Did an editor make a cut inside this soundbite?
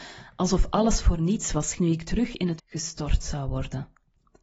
yes; 2 cuts; at 1.8 s, 2.6 s

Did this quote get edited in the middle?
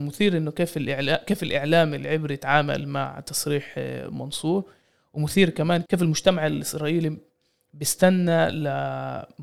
no; 0 cuts

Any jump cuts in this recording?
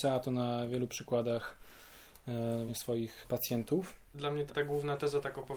yes; 3 cuts; at 2.7 s, 4.0 s, 4.5 s

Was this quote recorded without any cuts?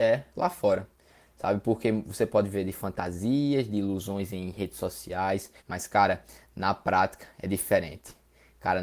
no; 1 cut; at 5.6 s

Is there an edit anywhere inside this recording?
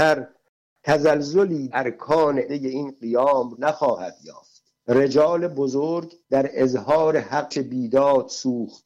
yes; 6 cuts; at 1.7 s, 2.5 s, 3.5 s, 4.8 s, 6.2 s, 7.5 s

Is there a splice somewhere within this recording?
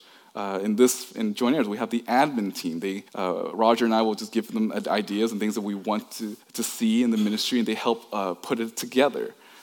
yes; 2 cuts; at 3.1 s, 6.4 s

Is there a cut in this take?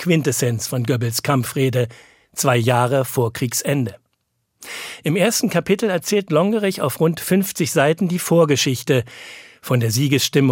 no; 0 cuts

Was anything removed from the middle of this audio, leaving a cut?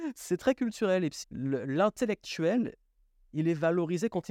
yes; 1 cut; at 1.2 s

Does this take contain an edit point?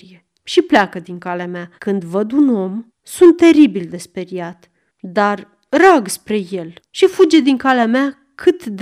yes; 4 cuts; at 1.8 s, 2.9 s, 4.9 s, 6.8 s

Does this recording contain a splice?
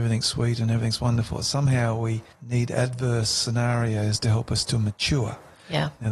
yes; 1 cut; at 2.3 s

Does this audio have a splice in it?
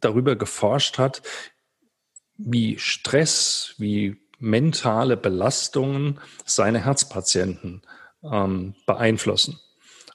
no; 0 cuts

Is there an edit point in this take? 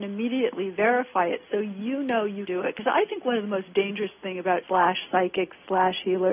yes; 2 cuts; at 2.5 s, 4.6 s

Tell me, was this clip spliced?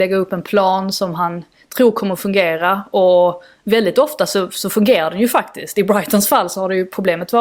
no; 0 cuts

